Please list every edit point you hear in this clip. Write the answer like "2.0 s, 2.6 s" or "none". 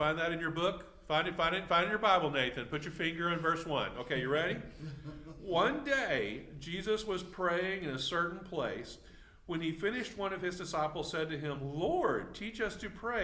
none

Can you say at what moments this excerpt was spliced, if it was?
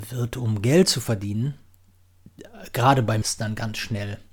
3.2 s

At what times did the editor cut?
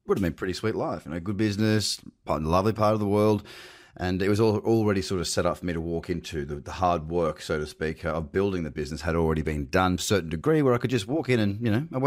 10.0 s

